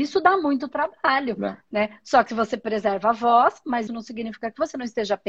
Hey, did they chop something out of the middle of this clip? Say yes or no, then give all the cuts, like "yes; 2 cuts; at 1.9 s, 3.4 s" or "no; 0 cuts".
yes; 1 cut; at 3.9 s